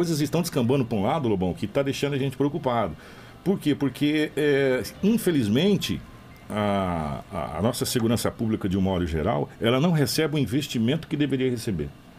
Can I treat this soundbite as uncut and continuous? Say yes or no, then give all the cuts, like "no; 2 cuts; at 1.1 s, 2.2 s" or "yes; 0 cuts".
yes; 0 cuts